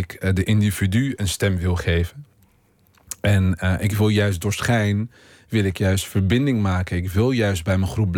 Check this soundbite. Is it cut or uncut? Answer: uncut